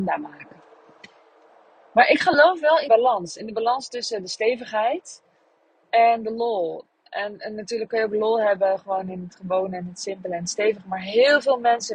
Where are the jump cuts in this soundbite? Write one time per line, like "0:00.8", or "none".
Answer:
0:02.9